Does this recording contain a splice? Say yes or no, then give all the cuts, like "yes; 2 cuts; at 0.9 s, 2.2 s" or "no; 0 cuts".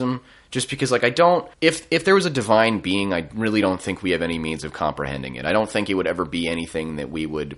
yes; 1 cut; at 1.5 s